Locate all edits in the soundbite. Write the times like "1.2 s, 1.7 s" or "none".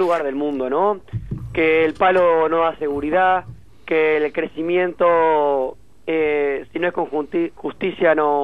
none